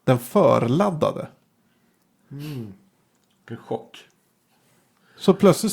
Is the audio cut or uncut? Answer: uncut